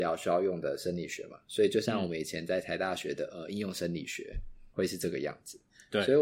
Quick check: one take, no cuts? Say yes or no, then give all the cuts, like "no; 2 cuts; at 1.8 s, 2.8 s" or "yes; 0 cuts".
no; 1 cut; at 4.7 s